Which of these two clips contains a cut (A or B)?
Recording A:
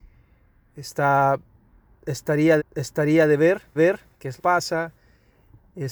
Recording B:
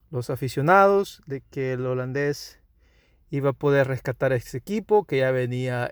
A